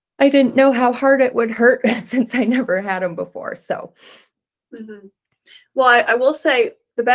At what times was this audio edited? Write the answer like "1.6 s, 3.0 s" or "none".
none